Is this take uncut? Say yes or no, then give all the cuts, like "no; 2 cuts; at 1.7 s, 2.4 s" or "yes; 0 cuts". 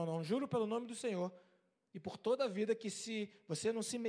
yes; 0 cuts